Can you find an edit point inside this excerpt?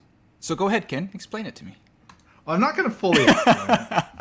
no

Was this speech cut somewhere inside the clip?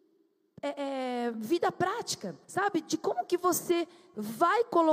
yes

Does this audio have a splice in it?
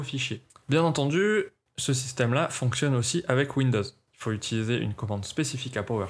no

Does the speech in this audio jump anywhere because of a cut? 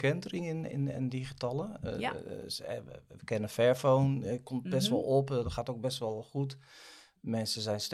no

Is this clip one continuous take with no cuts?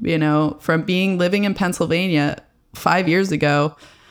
yes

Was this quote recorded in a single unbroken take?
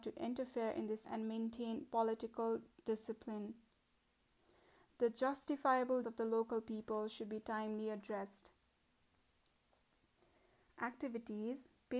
no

